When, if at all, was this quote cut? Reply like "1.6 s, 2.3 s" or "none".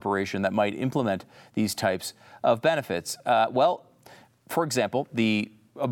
none

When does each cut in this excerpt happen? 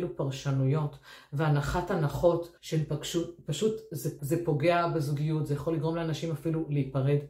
2.6 s, 4.2 s

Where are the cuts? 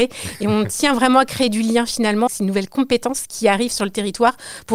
2.3 s

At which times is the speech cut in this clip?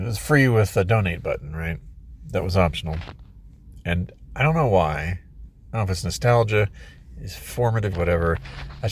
7.9 s

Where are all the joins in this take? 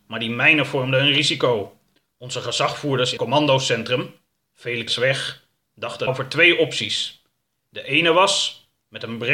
3.2 s, 4.9 s, 6.1 s

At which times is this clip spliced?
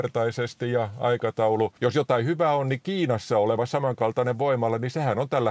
1.8 s

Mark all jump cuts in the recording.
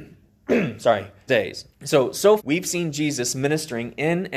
1.3 s, 1.7 s, 2.4 s

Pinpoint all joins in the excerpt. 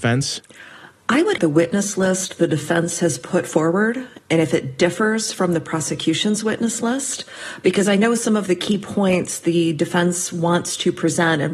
1.4 s

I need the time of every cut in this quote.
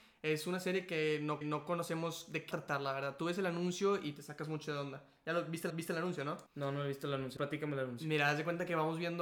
1.4 s, 2.5 s, 5.7 s, 6.5 s, 7.4 s

